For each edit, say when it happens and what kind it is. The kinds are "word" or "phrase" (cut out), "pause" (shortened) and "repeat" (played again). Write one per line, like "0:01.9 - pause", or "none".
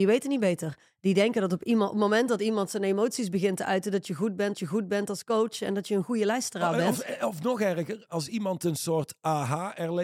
0:04.5 - repeat